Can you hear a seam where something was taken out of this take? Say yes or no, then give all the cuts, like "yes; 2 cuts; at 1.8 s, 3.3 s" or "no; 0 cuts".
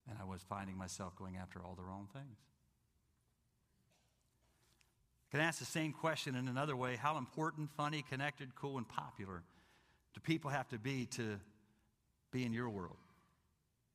no; 0 cuts